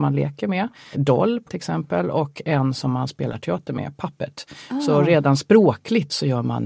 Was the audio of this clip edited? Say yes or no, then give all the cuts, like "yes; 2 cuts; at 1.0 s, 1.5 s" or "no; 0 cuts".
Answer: yes; 2 cuts; at 0.9 s, 1.5 s